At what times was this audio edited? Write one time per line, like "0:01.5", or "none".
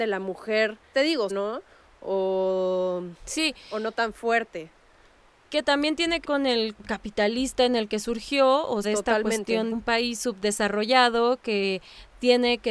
0:00.9
0:01.3
0:06.2
0:06.8
0:08.8
0:09.7